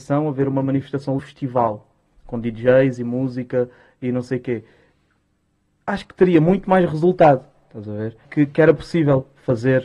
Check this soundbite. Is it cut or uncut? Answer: cut